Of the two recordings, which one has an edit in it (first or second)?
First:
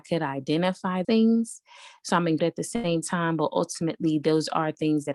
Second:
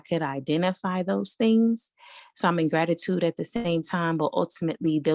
first